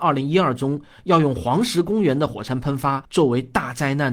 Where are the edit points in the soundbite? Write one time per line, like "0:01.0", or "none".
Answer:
0:03.0